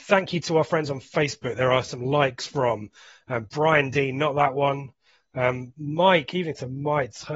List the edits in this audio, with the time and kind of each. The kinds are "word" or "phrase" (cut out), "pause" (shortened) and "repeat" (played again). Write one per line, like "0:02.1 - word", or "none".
none